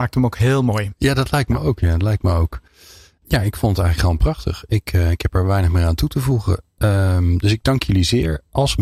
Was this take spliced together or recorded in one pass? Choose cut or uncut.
uncut